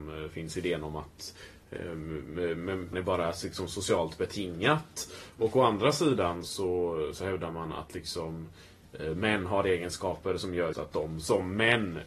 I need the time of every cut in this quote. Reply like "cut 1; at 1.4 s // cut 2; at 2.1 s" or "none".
cut 1; at 2.9 s // cut 2; at 6.4 s // cut 3; at 10.7 s